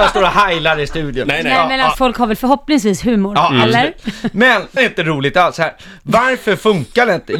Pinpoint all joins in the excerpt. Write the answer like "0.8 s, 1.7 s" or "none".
1.9 s, 4.8 s

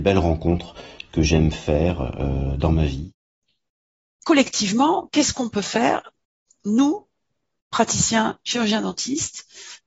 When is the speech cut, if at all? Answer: none

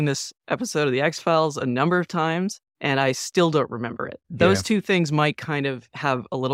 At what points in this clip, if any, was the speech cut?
2.7 s, 4.2 s

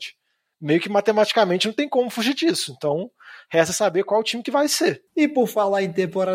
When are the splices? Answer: 5.1 s

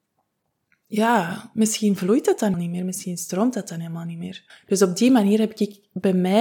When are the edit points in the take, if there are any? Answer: 2.5 s, 4.5 s

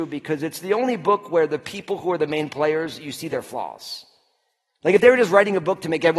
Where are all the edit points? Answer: none

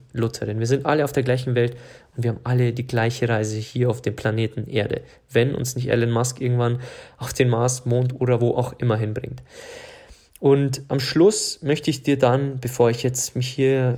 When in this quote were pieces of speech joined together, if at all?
none

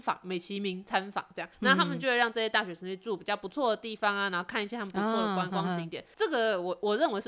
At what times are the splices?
1.5 s

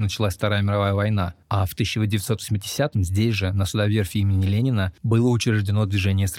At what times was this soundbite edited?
1.4 s

